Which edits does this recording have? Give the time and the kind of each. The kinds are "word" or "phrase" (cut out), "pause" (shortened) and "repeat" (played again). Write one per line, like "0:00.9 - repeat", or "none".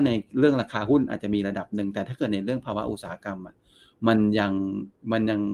none

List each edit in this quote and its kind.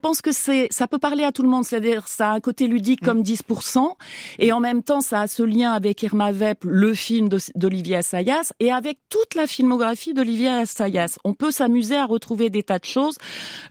none

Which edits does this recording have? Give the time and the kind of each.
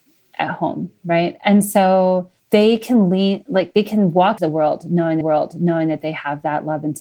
0:02.4 - pause
0:04.4 - phrase
0:05.2 - repeat

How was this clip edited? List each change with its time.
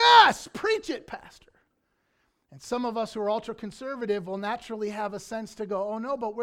none

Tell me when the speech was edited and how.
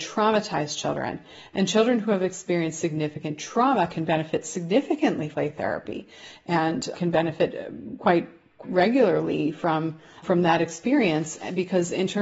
0:05.3 - word
0:06.9 - word
0:08.6 - word
0:10.2 - word

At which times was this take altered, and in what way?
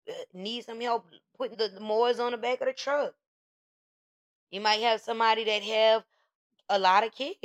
0:01.5 - word

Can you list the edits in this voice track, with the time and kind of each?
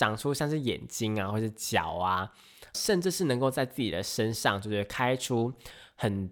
0:02.7 - word

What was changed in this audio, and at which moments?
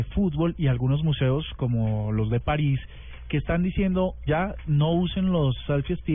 0:04.3 - word

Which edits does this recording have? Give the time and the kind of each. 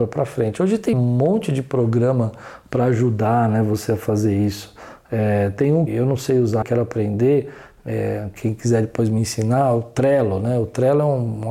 0:00.9 - word
0:05.9 - word
0:06.6 - word

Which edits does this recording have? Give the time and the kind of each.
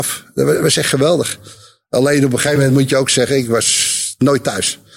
none

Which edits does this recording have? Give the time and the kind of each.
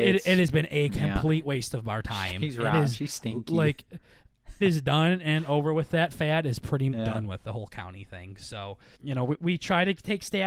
0:04.6 - phrase
0:06.9 - word
0:08.9 - word

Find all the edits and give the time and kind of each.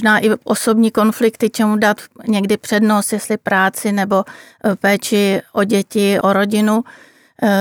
0:06.2 - word

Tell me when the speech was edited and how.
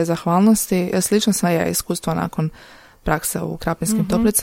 0:01.4 - word

